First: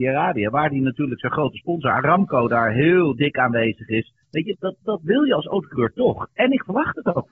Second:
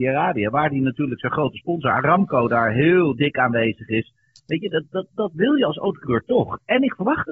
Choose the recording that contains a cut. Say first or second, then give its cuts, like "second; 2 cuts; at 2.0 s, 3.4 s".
first; 2 cuts; at 4.2 s, 4.5 s